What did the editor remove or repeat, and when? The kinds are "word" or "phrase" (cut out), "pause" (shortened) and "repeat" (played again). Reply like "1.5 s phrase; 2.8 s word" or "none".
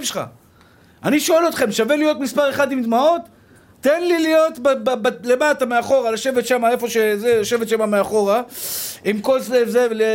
none